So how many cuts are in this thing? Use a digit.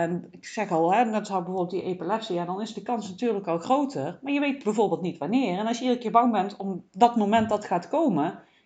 1